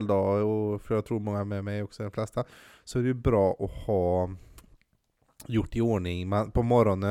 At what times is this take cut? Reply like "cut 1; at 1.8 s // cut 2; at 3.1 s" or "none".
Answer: none